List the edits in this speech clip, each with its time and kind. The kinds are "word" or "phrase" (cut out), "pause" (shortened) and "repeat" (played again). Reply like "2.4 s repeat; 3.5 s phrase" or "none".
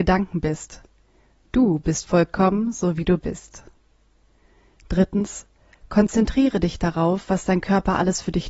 none